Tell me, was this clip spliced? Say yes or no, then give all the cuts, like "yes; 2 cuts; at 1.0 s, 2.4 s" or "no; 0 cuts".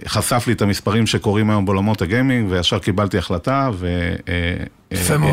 no; 0 cuts